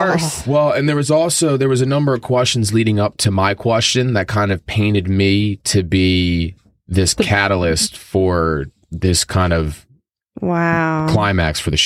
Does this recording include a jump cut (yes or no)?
no